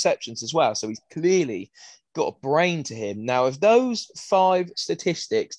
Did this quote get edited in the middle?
no; 0 cuts

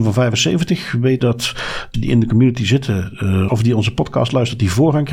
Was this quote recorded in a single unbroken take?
no; 3 cuts; at 1.2 s, 1.9 s, 3.5 s

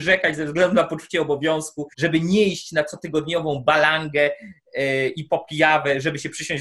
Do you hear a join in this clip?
yes; 1 cut; at 1.9 s

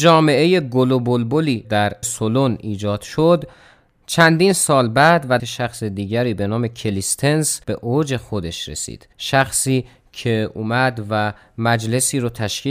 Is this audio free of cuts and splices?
no; 5 cuts; at 1.6 s, 2.0 s, 5.4 s, 7.6 s, 9.1 s

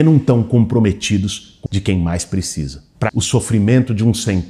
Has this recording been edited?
yes; 2 cuts; at 1.7 s, 3.1 s

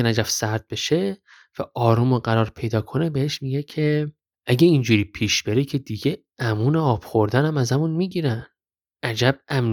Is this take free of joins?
yes; 0 cuts

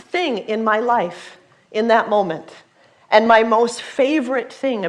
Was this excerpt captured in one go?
yes; 0 cuts

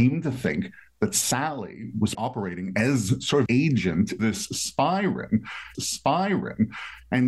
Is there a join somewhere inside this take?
yes; 4 cuts; at 2.1 s, 3.5 s, 4.2 s, 5.7 s

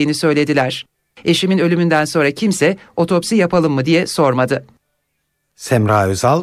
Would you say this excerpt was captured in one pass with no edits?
yes; 0 cuts

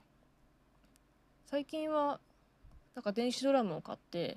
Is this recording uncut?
no; 1 cut; at 2.9 s

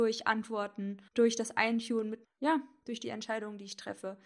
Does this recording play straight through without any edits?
no; 2 cuts; at 1.1 s, 2.2 s

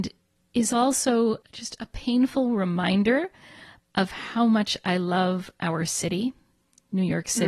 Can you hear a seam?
no; 0 cuts

